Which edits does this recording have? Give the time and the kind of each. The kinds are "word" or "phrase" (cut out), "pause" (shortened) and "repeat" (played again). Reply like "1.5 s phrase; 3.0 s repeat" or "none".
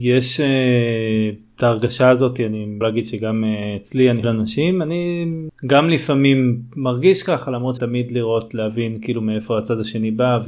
2.8 s word; 4.2 s phrase; 7.8 s phrase